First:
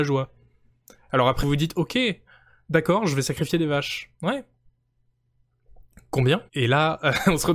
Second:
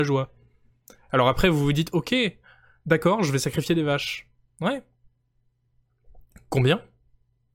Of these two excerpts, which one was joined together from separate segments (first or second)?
first